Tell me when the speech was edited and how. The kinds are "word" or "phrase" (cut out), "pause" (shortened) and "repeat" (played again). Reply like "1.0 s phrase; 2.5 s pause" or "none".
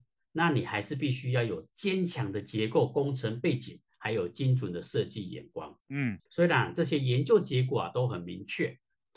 5.8 s pause; 6.3 s pause